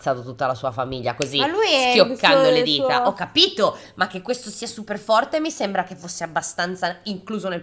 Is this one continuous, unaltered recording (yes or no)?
yes